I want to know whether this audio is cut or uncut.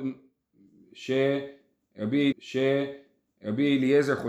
cut